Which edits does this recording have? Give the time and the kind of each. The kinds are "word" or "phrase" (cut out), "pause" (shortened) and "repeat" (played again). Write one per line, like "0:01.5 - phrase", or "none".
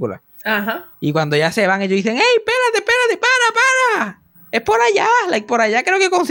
0:00.9 - pause
0:04.3 - pause